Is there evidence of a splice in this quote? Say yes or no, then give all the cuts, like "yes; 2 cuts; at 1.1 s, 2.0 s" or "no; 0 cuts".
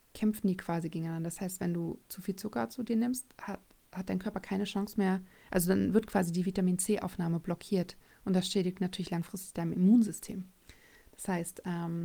no; 0 cuts